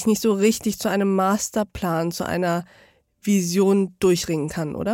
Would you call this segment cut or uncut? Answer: uncut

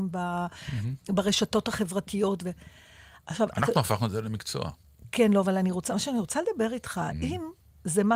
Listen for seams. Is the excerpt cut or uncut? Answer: uncut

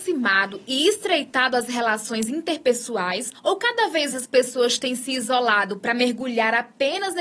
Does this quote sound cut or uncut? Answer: cut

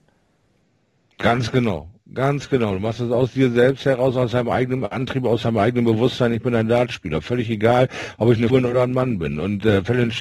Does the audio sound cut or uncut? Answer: cut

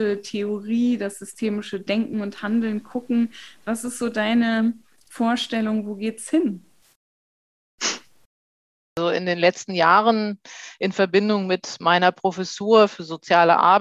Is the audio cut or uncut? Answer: uncut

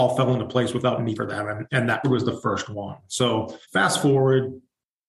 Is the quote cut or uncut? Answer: cut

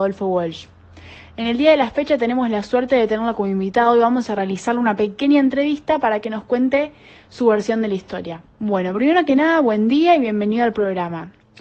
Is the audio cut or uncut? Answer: cut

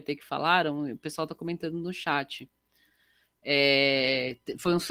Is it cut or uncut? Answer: uncut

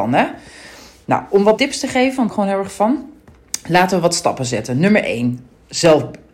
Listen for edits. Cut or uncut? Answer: cut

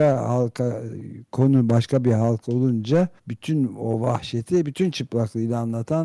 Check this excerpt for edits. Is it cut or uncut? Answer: cut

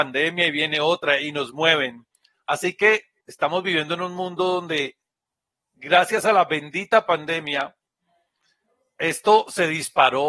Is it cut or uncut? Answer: uncut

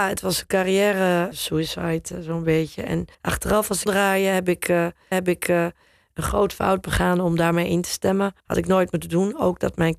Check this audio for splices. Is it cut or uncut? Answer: cut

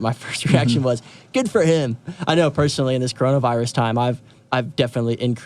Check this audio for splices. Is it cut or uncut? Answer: uncut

